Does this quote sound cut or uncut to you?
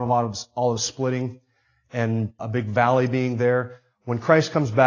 cut